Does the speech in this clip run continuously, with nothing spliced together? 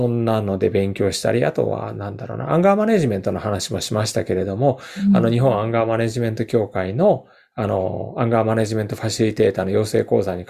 yes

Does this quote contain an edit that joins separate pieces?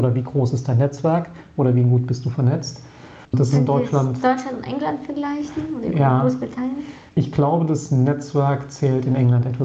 yes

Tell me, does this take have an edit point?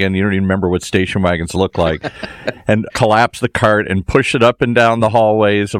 yes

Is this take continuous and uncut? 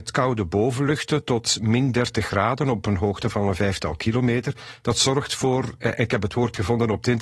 yes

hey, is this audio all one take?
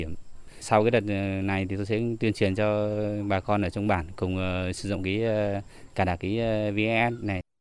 yes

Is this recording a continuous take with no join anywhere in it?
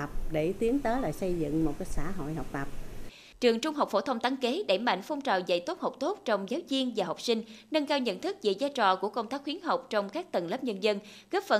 yes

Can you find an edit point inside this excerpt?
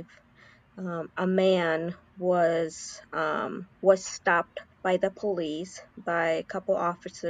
yes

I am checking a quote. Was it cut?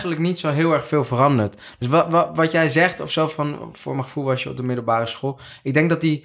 no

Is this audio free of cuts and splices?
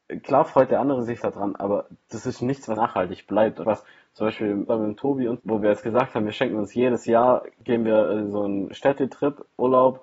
no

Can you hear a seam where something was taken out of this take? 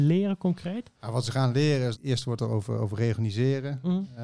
yes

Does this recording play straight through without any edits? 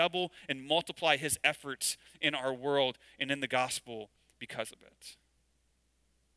yes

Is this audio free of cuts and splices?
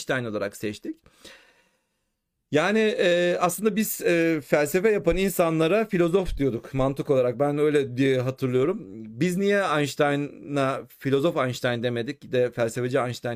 yes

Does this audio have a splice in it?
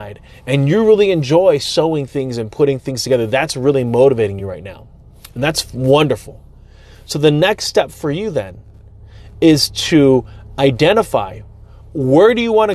no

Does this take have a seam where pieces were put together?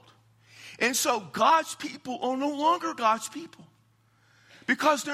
no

